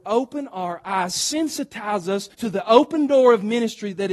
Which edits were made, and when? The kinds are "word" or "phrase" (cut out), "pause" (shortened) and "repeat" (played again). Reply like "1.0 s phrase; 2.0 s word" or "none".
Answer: 2.3 s pause